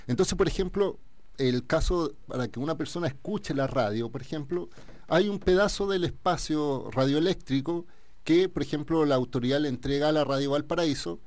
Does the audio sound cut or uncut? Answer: uncut